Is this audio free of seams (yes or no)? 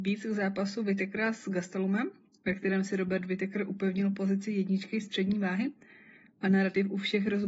yes